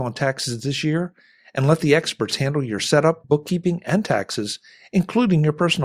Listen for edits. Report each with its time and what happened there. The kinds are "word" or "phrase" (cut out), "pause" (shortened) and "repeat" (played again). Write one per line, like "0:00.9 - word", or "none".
0:03.2 - word